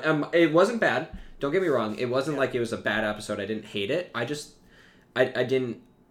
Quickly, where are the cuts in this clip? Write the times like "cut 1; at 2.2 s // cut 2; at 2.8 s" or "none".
none